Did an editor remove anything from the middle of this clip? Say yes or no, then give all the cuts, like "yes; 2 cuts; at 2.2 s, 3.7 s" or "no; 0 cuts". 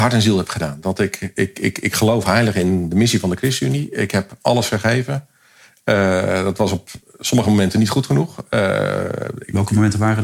no; 0 cuts